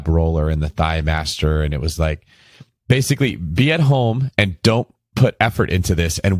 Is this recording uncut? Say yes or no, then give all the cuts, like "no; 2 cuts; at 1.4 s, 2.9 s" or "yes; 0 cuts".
yes; 0 cuts